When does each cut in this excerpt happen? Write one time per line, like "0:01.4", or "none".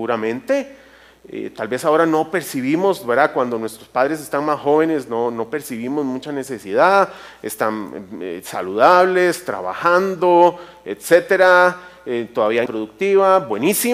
0:12.7